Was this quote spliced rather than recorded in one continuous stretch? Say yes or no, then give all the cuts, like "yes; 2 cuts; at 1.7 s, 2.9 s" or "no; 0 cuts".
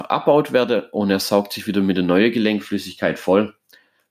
no; 0 cuts